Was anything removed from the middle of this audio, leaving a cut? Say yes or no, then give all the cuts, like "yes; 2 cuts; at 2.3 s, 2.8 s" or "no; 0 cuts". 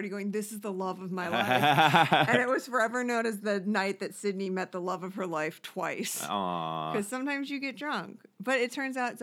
no; 0 cuts